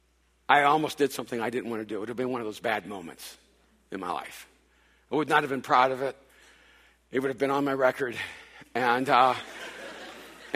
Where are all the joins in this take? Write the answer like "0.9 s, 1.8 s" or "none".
none